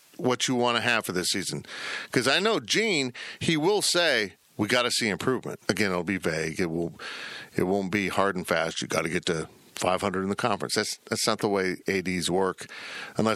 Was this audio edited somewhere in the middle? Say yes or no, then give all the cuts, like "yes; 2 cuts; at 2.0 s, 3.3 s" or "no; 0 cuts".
yes; 1 cut; at 5.6 s